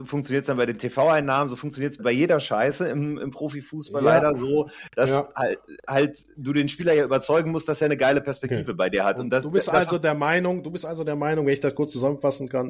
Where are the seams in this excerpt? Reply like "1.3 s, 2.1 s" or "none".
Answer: 2.0 s